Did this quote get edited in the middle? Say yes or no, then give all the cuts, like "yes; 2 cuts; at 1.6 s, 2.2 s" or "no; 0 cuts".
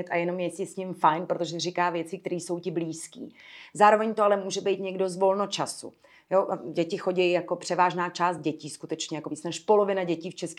no; 0 cuts